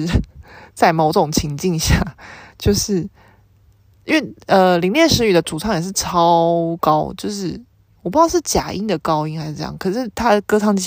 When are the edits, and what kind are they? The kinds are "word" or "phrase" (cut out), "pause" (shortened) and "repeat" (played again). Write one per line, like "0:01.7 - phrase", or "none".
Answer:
0:07.7 - pause